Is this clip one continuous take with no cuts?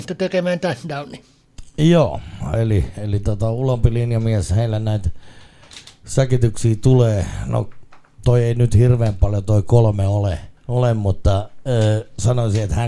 no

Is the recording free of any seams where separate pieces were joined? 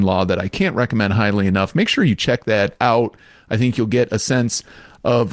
yes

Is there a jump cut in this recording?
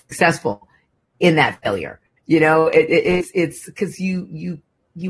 no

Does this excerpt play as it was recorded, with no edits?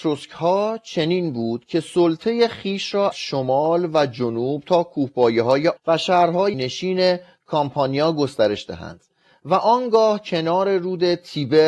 no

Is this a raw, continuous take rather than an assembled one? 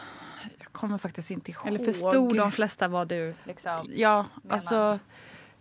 no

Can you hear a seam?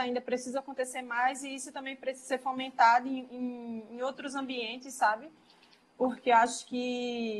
no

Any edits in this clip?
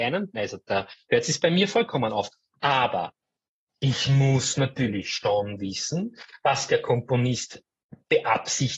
no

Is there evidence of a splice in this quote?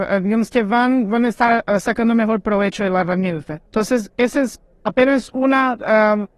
yes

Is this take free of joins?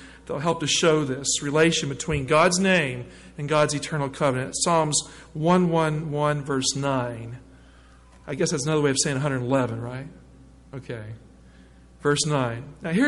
yes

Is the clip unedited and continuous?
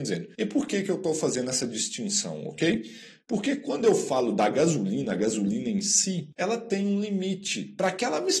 yes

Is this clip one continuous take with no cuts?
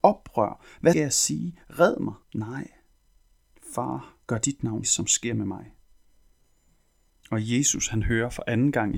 no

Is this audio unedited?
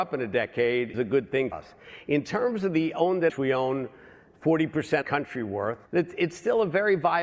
no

